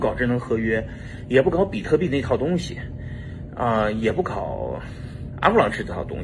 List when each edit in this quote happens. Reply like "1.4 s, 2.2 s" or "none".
none